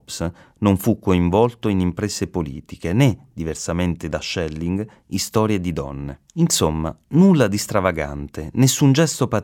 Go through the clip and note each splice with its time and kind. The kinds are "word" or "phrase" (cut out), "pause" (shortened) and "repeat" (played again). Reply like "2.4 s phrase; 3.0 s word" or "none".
6.3 s pause